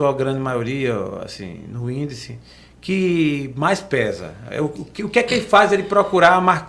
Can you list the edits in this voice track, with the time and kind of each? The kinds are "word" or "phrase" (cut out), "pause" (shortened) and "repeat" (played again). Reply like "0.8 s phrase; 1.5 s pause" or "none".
none